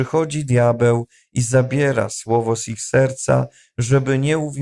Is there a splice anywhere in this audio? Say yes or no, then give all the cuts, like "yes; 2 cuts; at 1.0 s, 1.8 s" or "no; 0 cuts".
no; 0 cuts